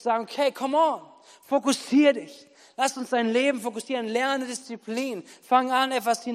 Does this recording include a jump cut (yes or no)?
no